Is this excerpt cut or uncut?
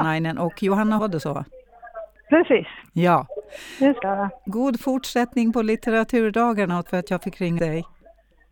cut